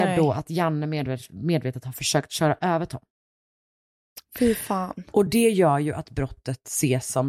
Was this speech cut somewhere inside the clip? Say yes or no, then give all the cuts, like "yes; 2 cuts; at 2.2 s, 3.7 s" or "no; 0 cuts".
no; 0 cuts